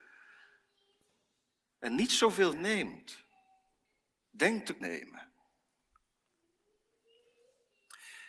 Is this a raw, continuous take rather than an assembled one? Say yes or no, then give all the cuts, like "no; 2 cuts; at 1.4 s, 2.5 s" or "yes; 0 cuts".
no; 2 cuts; at 2.5 s, 4.8 s